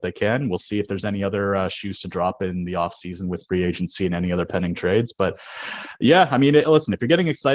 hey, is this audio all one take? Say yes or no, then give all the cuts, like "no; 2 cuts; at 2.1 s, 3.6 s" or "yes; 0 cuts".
no; 1 cut; at 6.6 s